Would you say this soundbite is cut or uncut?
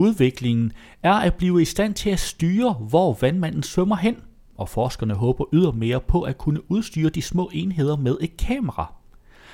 uncut